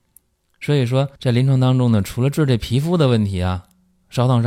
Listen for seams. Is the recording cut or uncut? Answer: cut